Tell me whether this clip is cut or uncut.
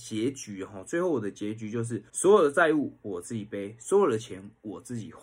cut